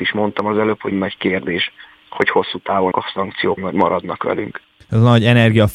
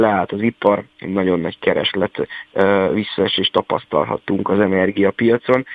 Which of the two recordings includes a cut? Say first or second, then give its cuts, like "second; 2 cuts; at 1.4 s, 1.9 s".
first; 3 cuts; at 0.9 s, 2.9 s, 3.6 s